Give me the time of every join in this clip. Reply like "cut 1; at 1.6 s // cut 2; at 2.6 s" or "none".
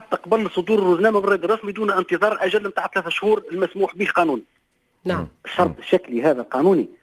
none